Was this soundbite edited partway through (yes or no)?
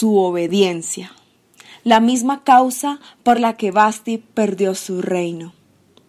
no